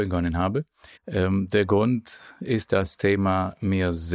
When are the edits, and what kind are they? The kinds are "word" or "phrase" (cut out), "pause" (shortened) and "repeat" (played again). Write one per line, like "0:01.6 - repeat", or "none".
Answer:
0:01.0 - pause
0:02.7 - word
0:03.0 - word